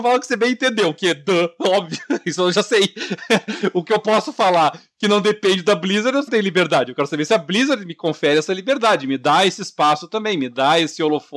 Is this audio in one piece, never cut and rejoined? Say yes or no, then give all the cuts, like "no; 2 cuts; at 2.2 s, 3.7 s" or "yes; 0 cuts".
no; 1 cut; at 6.3 s